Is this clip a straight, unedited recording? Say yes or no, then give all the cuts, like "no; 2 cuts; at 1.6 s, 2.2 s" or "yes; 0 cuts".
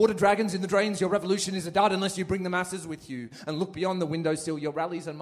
yes; 0 cuts